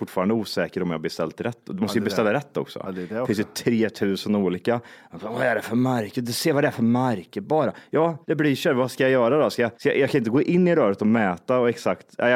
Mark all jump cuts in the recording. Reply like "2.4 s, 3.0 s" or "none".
8.2 s, 9.7 s